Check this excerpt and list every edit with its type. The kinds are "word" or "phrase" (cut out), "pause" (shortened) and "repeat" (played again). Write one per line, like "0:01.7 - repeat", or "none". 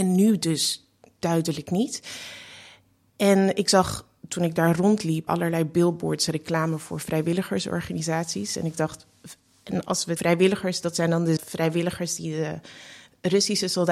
0:05.3 - word
0:10.2 - phrase
0:11.4 - phrase

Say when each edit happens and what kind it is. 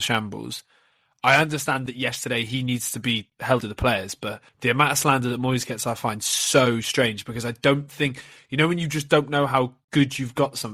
0:03.6 - phrase
0:04.5 - pause

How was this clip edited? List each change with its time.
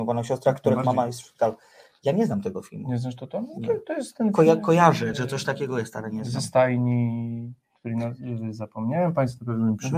none

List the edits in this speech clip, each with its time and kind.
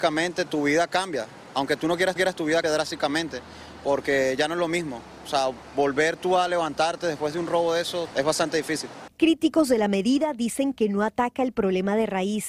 0:02.2 - repeat
0:02.6 - word
0:08.1 - word

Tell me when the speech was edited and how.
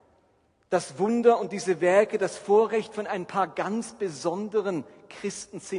none

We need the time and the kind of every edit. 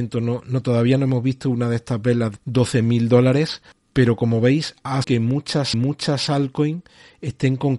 0:02.4 - word
0:03.7 - pause
0:05.0 - word
0:05.7 - repeat

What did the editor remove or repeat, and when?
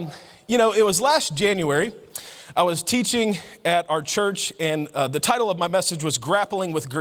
none

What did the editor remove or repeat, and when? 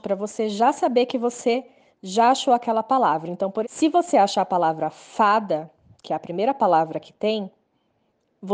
0:03.6 - word

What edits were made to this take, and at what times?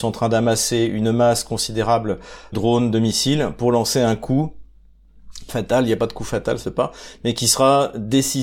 0:02.5 - word
0:05.5 - phrase
0:06.6 - word

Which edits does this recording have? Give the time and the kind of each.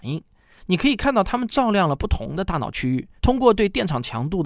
0:03.2 - pause

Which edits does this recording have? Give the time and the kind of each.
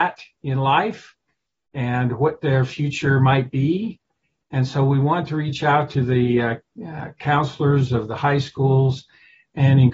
none

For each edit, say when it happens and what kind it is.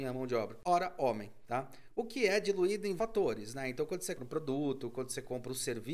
0:03.0 - word
0:04.2 - word

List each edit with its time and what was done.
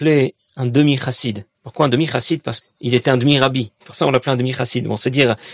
0:01.5 - pause
0:02.6 - word
0:03.8 - pause

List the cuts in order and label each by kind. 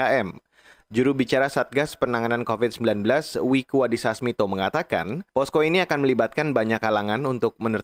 0:05.3 - pause

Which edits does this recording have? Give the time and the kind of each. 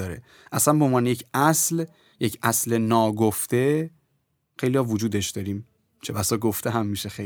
none

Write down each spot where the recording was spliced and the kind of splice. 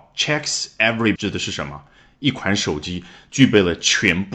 0:01.2 - word

